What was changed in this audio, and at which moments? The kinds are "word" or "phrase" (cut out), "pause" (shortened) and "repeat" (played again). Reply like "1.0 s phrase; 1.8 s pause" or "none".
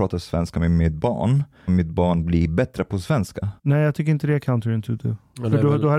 1.7 s word; 3.6 s pause